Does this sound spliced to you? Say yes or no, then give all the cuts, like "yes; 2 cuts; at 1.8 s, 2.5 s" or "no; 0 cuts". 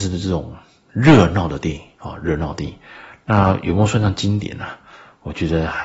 no; 0 cuts